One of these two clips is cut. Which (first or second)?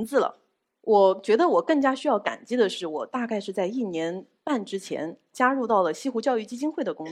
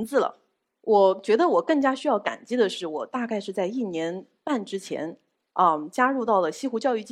first